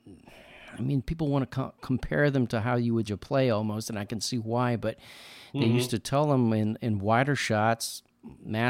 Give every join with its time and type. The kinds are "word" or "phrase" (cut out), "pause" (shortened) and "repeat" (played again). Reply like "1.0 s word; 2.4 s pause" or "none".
3.1 s word

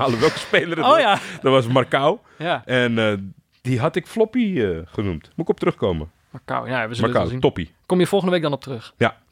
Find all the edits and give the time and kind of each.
none

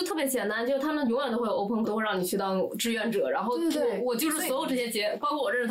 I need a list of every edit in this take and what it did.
1.8 s word

